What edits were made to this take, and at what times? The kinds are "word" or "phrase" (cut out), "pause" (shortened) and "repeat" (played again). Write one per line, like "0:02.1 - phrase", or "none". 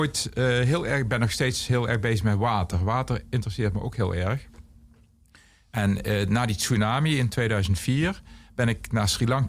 none